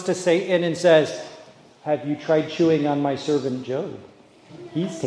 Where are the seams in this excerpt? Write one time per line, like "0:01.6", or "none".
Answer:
none